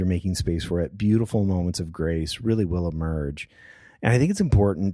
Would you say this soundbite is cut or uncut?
uncut